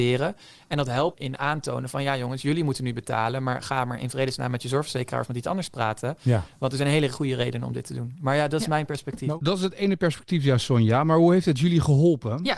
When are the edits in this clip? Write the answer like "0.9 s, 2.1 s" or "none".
1.1 s